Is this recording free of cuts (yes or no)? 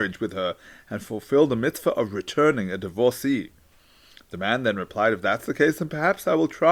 yes